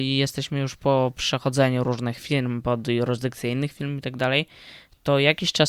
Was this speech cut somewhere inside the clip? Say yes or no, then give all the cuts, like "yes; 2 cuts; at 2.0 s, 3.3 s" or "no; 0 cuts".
no; 0 cuts